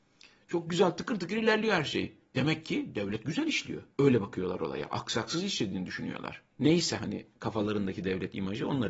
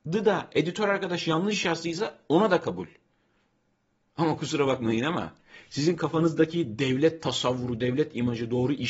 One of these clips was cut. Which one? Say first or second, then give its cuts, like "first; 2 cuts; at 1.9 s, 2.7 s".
first; 2 cuts; at 3.9 s, 6.5 s